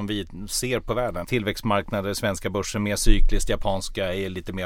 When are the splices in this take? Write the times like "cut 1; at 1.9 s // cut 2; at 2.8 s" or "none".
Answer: cut 1; at 1.2 s